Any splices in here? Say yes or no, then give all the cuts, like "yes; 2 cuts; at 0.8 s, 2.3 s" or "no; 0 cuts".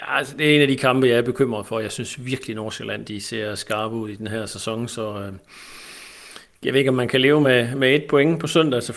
no; 0 cuts